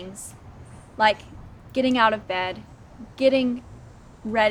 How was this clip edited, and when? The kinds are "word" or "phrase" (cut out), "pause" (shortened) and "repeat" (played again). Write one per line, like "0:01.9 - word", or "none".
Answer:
none